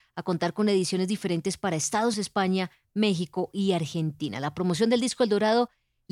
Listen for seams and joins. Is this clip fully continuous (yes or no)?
no